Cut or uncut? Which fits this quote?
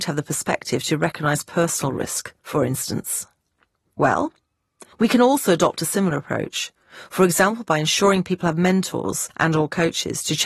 cut